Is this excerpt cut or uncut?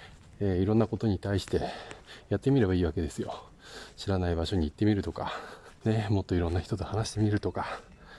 cut